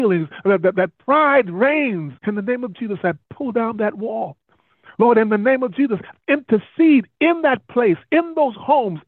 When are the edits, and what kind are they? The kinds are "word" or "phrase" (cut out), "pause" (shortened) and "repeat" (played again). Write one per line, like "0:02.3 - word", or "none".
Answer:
0:02.2 - pause